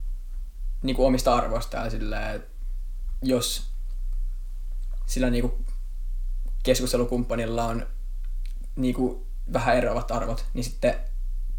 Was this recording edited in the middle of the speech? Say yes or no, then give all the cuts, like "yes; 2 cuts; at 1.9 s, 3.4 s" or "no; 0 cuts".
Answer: no; 0 cuts